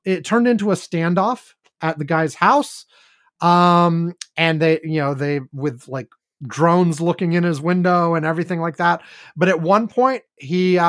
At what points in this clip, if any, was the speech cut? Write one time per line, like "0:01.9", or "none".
none